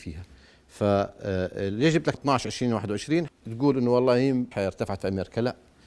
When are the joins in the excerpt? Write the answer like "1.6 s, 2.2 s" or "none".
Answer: 2.1 s, 3.3 s, 4.5 s